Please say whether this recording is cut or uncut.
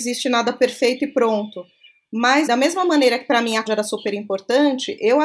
cut